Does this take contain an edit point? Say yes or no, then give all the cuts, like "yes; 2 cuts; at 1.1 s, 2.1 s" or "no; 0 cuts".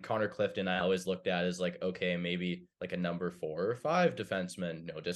yes; 1 cut; at 2.7 s